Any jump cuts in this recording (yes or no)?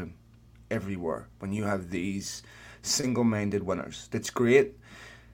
no